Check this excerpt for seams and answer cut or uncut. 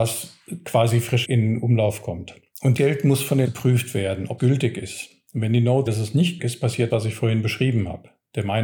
cut